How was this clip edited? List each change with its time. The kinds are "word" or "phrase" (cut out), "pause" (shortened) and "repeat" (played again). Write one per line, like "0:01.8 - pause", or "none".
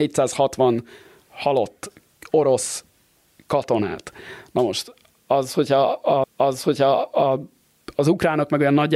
0:06.2 - repeat